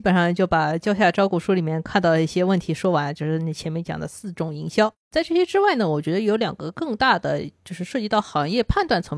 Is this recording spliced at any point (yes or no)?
no